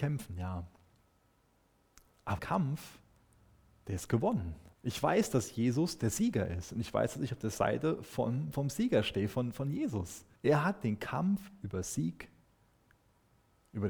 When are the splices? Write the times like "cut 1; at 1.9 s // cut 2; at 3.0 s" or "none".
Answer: cut 1; at 2.4 s // cut 2; at 4.7 s // cut 3; at 8.5 s // cut 4; at 10.4 s